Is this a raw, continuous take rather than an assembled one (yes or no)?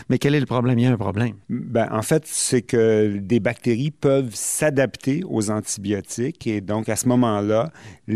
no